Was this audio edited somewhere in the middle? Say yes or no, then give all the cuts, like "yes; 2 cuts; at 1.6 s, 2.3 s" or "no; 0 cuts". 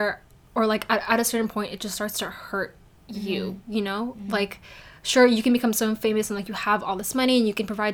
no; 0 cuts